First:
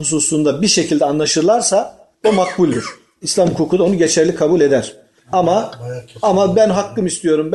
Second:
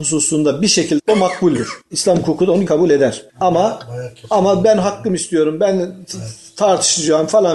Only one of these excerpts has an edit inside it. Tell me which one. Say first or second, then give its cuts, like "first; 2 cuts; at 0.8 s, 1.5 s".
second; 4 cuts; at 1.0 s, 1.8 s, 2.7 s, 3.3 s